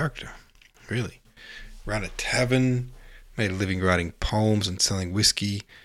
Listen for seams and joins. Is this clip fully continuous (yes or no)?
yes